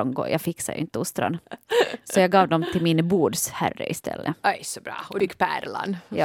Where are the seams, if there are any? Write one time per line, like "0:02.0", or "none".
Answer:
0:05.2

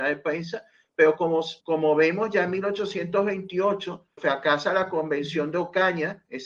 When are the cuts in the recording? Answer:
0:01.6
0:04.2

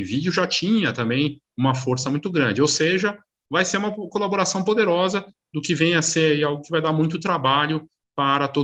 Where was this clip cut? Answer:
none

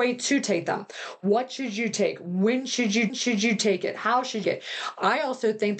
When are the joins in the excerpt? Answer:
0:03.1
0:04.4

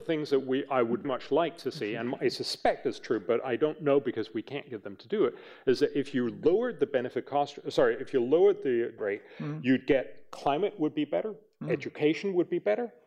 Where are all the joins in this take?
0:01.0
0:09.0

